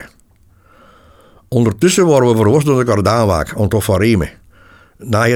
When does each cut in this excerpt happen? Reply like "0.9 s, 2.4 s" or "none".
none